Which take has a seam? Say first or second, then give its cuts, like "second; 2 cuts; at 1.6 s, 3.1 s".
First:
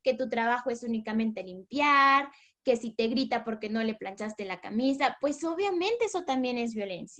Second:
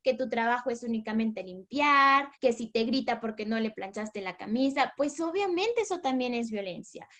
second; 1 cut; at 2.3 s